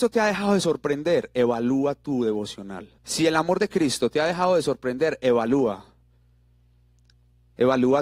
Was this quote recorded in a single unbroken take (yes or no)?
no